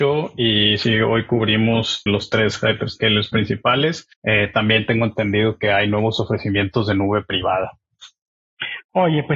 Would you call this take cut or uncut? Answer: cut